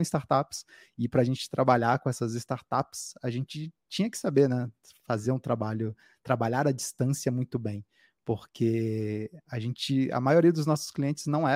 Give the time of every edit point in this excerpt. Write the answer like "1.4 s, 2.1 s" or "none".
none